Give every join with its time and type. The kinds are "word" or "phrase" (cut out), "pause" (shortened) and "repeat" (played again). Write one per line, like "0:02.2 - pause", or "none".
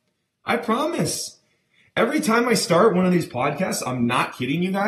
none